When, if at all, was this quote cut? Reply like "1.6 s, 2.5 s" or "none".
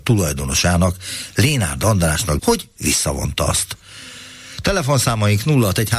2.4 s